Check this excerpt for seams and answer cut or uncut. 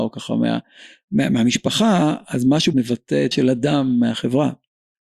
cut